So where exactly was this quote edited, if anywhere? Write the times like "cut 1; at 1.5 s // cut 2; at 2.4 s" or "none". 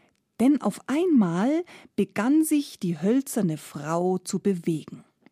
none